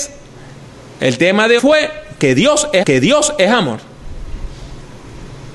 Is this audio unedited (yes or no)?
no